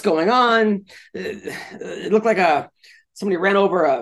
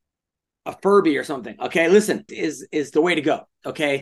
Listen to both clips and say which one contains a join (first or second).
second